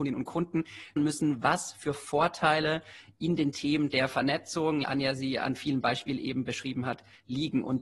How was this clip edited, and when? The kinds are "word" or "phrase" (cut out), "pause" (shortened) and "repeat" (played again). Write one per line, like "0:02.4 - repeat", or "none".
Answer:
0:01.0 - phrase
0:04.8 - phrase

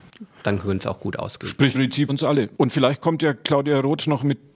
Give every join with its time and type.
0:01.7 - word
0:02.1 - word
0:02.5 - pause

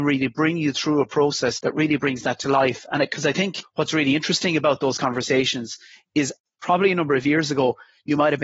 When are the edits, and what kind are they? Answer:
none

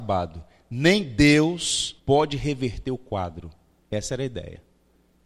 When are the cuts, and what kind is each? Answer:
0:02.0 - pause

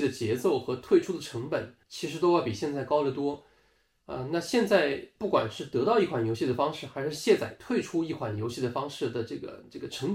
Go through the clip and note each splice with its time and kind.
0:01.8 - pause

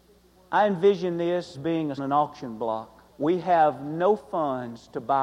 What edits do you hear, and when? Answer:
0:01.5 - word
0:02.0 - phrase
0:03.1 - pause

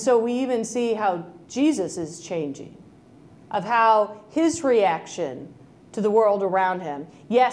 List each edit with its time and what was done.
none

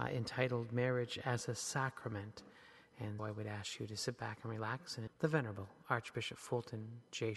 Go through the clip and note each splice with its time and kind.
0:03.2 - word
0:05.1 - word

